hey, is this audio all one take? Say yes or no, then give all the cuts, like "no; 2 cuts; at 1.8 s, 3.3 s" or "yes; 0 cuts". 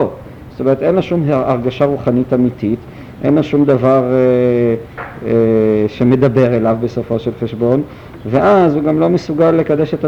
yes; 0 cuts